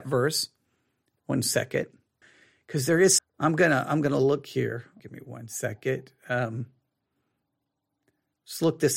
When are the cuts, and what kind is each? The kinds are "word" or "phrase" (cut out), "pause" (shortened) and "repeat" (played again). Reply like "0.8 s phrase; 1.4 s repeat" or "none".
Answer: 2.2 s pause; 3.2 s phrase; 5.0 s word